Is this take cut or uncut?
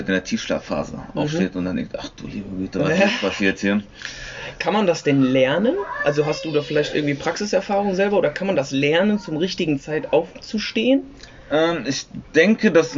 uncut